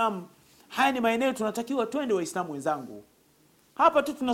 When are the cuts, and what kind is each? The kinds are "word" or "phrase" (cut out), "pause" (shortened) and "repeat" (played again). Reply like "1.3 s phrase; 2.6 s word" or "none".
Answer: none